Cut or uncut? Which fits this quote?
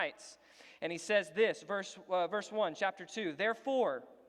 uncut